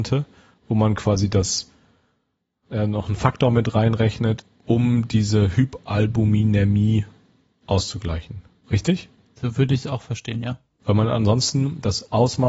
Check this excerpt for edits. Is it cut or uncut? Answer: uncut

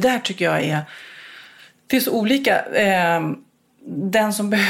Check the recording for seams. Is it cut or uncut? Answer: uncut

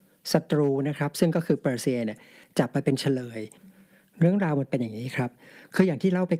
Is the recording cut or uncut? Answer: uncut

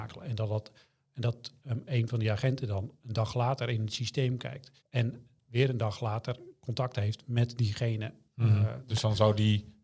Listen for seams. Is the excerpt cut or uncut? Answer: cut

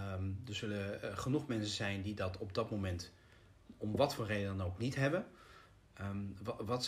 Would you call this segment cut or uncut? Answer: uncut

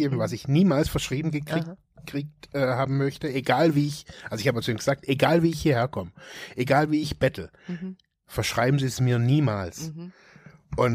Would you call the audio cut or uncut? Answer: uncut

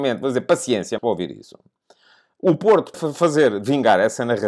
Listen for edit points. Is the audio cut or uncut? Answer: cut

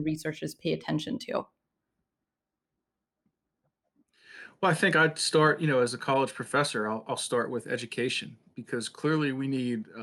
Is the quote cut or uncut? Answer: uncut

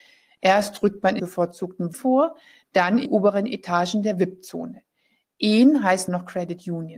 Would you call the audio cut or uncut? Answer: cut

